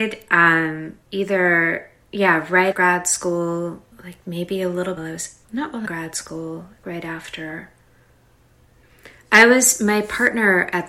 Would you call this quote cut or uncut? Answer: cut